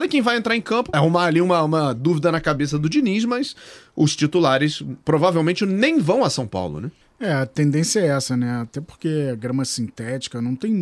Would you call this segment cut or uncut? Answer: cut